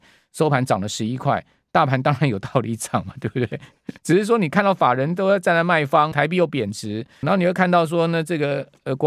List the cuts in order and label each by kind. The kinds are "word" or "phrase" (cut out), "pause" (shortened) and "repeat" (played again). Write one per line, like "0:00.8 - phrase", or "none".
0:04.0 - pause
0:06.1 - phrase
0:07.2 - word